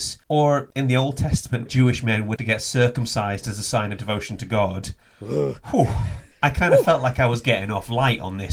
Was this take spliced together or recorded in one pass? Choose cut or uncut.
cut